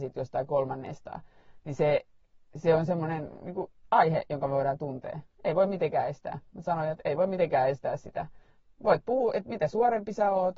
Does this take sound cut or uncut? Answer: uncut